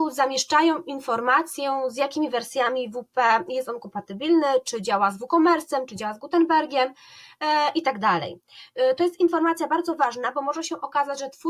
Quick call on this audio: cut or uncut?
uncut